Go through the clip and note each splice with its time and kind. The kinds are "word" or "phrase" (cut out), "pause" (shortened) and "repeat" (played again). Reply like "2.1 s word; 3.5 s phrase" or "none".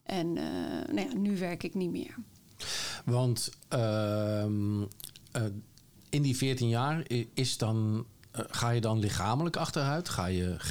none